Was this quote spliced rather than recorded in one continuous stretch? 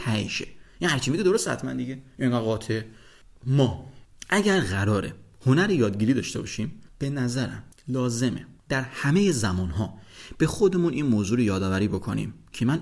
no; 0 cuts

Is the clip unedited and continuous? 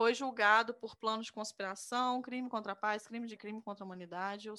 no; 1 cut; at 3.4 s

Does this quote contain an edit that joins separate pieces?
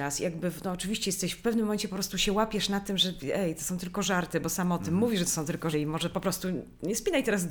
yes; 1 cut; at 5.7 s

